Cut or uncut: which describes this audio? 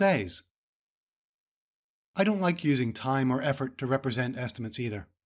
uncut